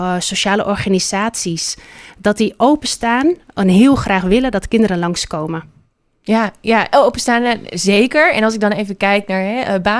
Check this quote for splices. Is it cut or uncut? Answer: uncut